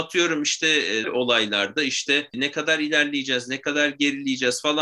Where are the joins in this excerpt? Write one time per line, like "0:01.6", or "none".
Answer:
0:01.0

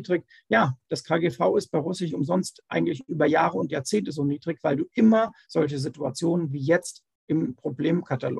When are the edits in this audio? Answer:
0:02.1

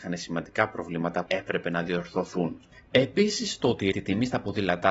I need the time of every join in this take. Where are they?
0:01.3
0:03.9

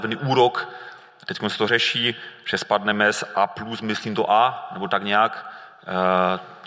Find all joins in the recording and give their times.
none

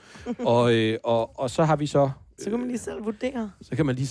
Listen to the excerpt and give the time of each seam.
0:01.3
0:02.4

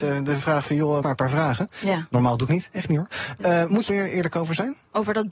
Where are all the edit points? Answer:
0:01.0
0:02.5
0:03.9

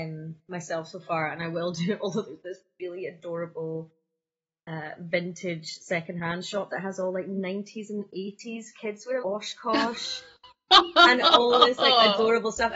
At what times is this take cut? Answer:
0:09.2

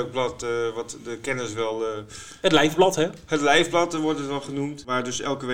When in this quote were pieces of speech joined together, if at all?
none

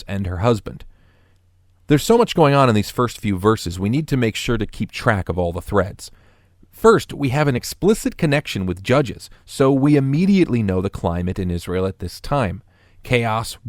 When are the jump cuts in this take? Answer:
none

